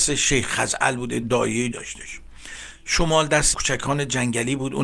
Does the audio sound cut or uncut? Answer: cut